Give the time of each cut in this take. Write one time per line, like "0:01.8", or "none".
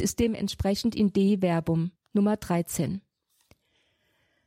0:02.0